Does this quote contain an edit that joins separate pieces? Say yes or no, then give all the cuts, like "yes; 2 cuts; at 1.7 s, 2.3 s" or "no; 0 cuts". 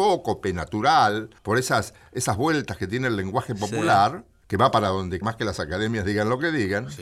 yes; 3 cuts; at 1.4 s, 4.4 s, 5.2 s